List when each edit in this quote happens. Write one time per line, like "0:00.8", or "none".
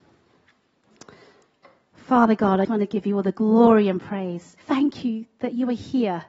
0:02.6
0:04.6